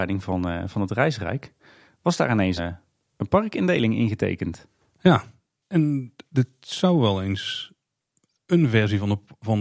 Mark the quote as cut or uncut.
cut